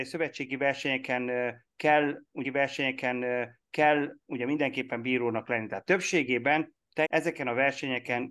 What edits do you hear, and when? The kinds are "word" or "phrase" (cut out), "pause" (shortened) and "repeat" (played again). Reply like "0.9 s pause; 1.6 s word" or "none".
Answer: 2.4 s repeat; 7.0 s word